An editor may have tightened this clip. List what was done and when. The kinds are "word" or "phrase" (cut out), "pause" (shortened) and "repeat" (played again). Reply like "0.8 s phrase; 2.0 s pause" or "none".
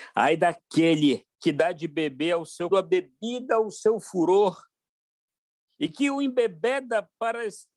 1.3 s pause; 2.7 s phrase